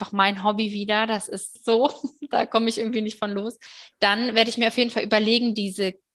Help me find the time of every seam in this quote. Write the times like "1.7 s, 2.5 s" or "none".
none